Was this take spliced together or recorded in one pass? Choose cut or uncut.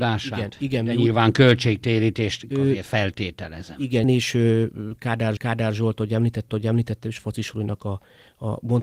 cut